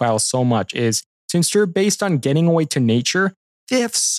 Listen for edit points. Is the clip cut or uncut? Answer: uncut